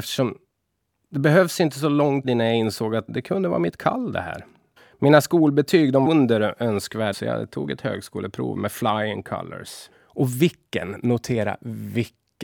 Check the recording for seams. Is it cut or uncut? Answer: cut